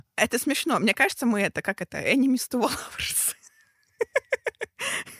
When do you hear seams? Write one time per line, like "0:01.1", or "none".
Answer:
none